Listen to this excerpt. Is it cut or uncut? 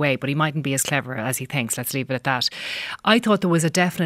uncut